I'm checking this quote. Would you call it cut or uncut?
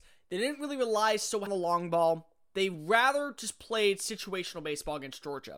cut